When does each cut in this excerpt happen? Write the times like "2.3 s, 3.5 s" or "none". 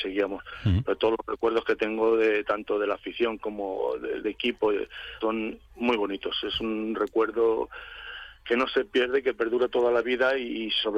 4.2 s, 5.2 s